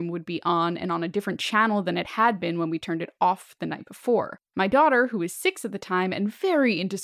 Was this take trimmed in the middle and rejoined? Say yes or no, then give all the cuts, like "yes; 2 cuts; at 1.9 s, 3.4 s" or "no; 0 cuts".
no; 0 cuts